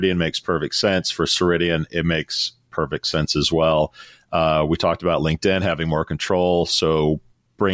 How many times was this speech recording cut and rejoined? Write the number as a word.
zero